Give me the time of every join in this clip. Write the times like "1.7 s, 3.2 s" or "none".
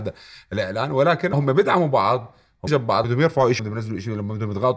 1.3 s, 2.7 s, 3.0 s, 3.6 s